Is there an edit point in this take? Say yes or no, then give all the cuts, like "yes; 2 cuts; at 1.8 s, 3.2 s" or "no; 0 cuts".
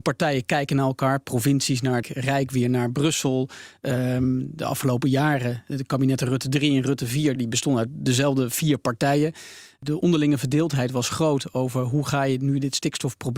yes; 2 cuts; at 2.0 s, 7.4 s